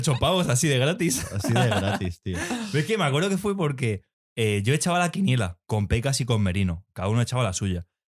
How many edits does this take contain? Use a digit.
2